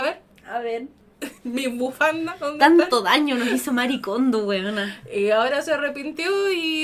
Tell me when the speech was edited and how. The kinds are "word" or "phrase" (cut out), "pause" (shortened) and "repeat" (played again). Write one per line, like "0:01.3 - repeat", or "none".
0:01.4 - pause